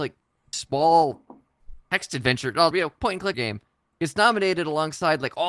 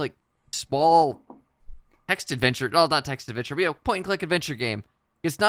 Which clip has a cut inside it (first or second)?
first